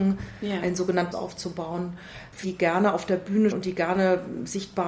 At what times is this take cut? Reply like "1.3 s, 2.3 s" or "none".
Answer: 1.1 s, 2.4 s, 3.5 s